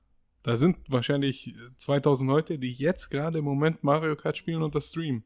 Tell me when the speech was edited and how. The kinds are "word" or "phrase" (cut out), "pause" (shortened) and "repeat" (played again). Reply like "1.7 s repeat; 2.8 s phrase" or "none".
none